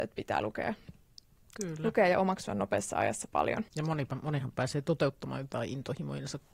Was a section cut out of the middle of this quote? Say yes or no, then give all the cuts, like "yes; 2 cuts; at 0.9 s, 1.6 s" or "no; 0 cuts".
yes; 1 cut; at 3.7 s